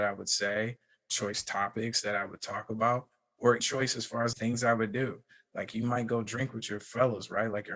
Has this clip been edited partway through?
yes; 2 cuts; at 3.6 s, 4.3 s

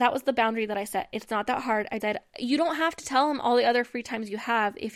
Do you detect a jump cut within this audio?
yes; 2 cuts; at 2.0 s, 2.3 s

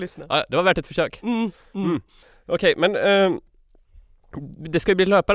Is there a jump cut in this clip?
no; 0 cuts

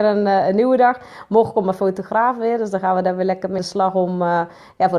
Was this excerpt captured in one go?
no; 1 cut; at 3.6 s

